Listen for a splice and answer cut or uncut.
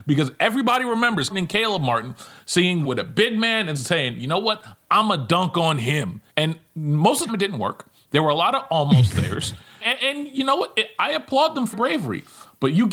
cut